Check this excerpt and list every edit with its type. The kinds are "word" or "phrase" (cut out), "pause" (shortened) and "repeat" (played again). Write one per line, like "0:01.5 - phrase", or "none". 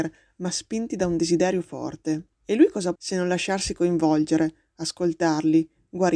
0:02.3 - pause
0:03.0 - phrase

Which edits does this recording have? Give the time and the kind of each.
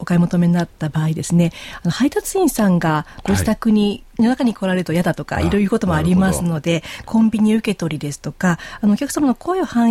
none

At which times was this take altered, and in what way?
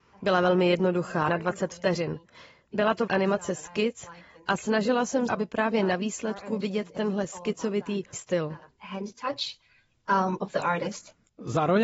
0:01.3 - word
0:03.1 - word
0:05.3 - word
0:06.6 - word
0:08.1 - word
0:10.4 - word

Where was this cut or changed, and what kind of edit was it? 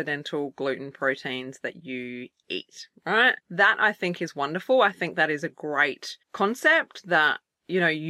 0:03.4 - pause
0:06.2 - pause

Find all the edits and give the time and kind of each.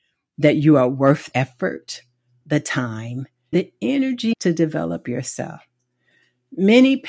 0:01.3 - word
0:03.5 - word
0:04.3 - word

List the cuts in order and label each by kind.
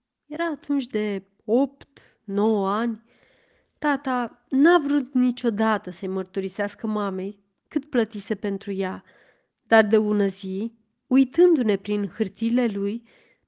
none

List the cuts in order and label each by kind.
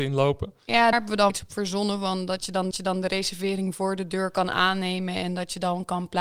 0:00.9 - word
0:01.3 - word
0:02.7 - repeat

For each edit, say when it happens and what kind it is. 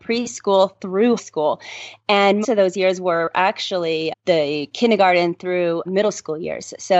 0:01.2 - word
0:02.4 - word
0:04.1 - word
0:05.8 - word

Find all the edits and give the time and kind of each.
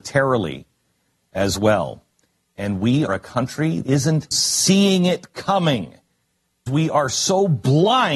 0:03.1 - word
0:03.8 - word
0:04.3 - word
0:06.7 - word

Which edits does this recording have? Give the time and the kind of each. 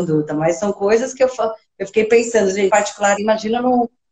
0:02.7 - word
0:03.2 - word

